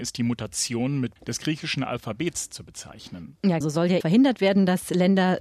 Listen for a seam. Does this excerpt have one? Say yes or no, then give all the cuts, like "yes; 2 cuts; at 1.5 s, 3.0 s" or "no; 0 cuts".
yes; 3 cuts; at 1.2 s, 3.6 s, 4.0 s